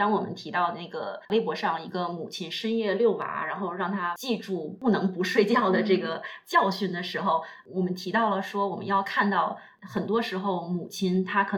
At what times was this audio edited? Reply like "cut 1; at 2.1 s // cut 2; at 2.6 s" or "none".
cut 1; at 1.2 s